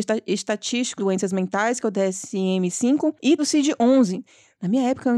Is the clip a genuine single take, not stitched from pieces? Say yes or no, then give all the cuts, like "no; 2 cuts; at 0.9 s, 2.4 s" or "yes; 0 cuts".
no; 2 cuts; at 1.0 s, 3.4 s